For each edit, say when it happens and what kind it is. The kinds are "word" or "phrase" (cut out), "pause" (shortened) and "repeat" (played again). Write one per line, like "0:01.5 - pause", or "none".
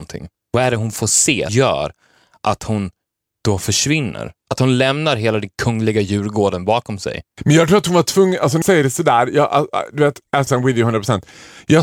0:01.5 - word
0:08.6 - word
0:10.5 - word